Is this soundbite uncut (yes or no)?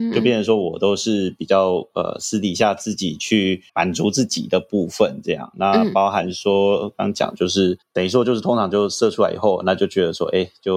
no